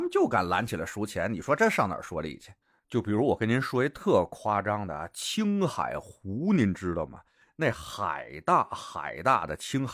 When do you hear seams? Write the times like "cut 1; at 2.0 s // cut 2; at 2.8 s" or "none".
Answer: none